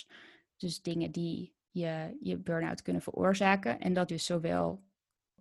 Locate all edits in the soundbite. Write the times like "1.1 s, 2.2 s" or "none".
1.6 s, 4.1 s